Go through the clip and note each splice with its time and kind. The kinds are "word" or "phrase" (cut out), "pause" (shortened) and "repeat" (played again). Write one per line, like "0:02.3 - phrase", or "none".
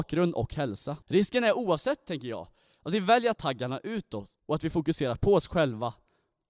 0:01.0 - pause
0:03.3 - word
0:04.4 - pause